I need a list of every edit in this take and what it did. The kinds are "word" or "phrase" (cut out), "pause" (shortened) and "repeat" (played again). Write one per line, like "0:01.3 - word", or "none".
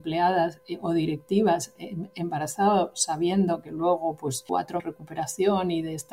0:04.8 - phrase